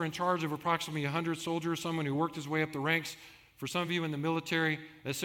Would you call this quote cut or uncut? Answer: uncut